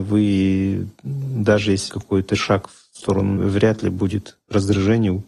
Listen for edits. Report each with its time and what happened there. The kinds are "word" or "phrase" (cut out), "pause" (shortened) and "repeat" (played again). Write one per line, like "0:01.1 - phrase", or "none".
0:01.9 - word
0:03.4 - phrase